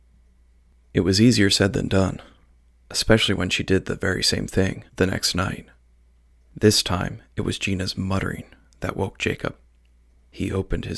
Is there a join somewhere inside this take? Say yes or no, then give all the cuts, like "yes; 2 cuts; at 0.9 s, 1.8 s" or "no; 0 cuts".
yes; 1 cut; at 4.9 s